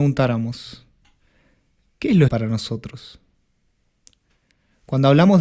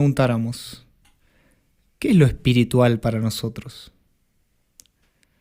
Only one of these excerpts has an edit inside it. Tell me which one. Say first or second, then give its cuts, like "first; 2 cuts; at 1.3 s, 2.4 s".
first; 1 cut; at 2.3 s